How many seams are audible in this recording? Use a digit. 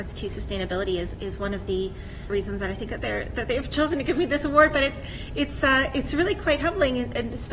1